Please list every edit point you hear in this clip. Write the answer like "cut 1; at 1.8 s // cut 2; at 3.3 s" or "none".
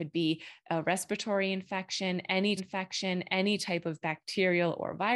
cut 1; at 2.6 s